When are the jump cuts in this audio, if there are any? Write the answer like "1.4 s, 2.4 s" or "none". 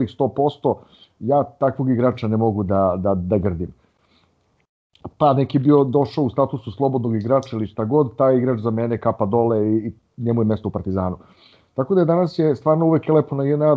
none